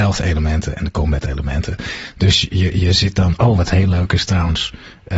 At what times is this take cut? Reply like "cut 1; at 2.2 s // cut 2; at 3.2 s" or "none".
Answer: none